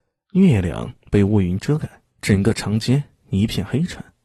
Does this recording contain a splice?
yes; 1 cut; at 2.1 s

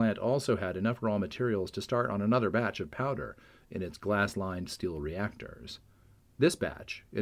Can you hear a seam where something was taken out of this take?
no; 0 cuts

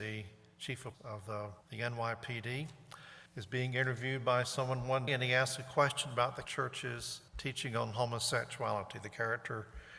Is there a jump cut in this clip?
yes; 6 cuts; at 0.9 s, 1.6 s, 3.3 s, 5.1 s, 6.4 s, 7.3 s

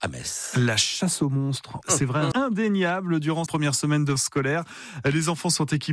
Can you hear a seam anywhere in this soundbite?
yes; 4 cuts; at 1.8 s, 2.3 s, 3.5 s, 4.2 s

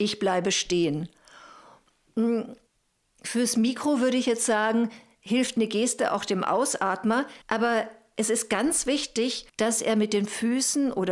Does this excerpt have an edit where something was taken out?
yes; 3 cuts; at 2.7 s, 7.4 s, 9.5 s

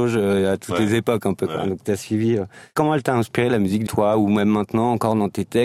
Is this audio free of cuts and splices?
no; 1 cut; at 3.9 s

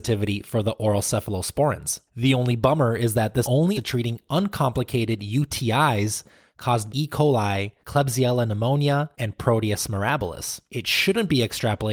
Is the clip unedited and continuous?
no; 7 cuts; at 2.1 s, 3.4 s, 3.7 s, 6.9 s, 7.8 s, 9.1 s, 10.7 s

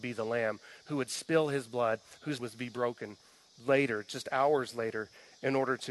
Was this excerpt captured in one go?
no; 1 cut; at 2.4 s

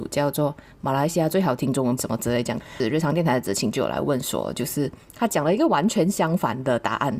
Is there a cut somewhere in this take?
yes; 1 cut; at 2.0 s

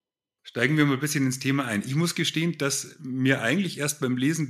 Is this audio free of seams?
yes; 0 cuts

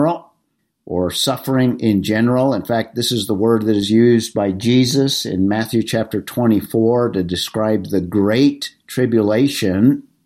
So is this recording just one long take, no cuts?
yes; 0 cuts

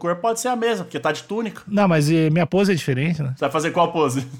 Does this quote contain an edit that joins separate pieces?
no; 0 cuts

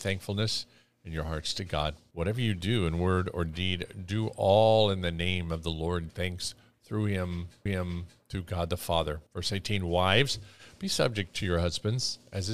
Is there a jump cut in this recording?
yes; 3 cuts; at 6.1 s, 7.7 s, 9.3 s

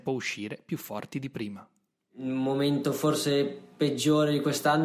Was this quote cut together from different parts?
no; 0 cuts

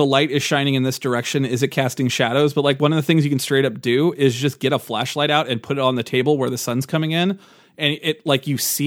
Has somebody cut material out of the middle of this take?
no; 0 cuts

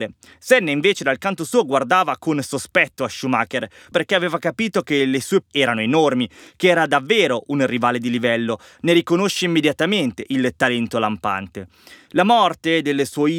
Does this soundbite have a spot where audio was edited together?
yes; 2 cuts; at 3.9 s, 5.4 s

